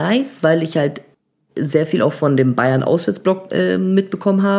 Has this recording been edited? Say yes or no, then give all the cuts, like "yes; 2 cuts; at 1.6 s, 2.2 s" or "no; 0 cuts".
no; 0 cuts